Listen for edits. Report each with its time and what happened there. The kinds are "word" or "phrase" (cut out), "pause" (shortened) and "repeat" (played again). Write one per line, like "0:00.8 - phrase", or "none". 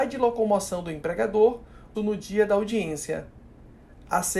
0:01.9 - phrase